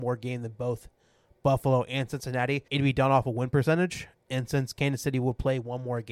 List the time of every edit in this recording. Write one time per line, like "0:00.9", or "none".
0:02.7